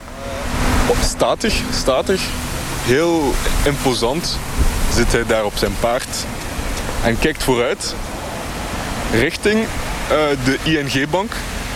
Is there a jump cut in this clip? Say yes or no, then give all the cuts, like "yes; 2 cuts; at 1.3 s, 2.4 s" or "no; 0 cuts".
no; 0 cuts